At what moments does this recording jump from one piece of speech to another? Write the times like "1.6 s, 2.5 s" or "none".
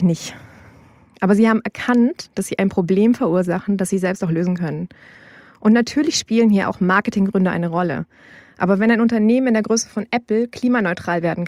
none